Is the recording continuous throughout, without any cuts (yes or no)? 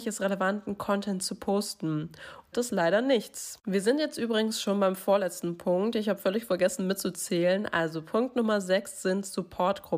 no